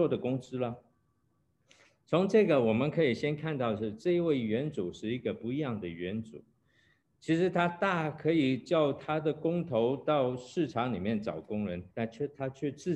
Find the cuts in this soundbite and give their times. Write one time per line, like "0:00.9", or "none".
0:11.9

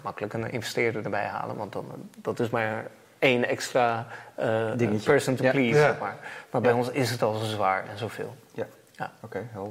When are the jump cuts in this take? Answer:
none

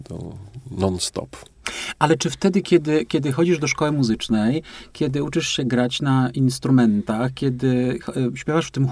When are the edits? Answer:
none

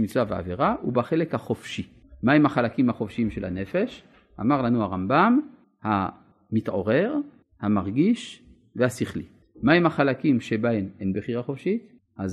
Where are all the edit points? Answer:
none

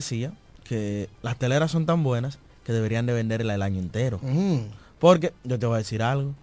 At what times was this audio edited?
0:01.1
0:02.5

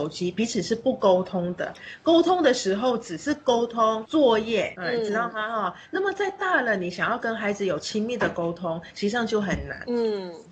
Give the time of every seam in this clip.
0:04.7

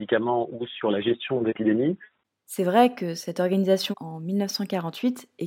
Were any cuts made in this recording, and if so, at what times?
0:01.5
0:03.9

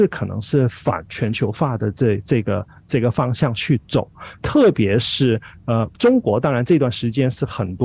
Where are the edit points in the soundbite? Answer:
0:05.9

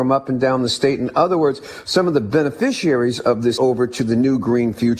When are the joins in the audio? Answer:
0:03.6

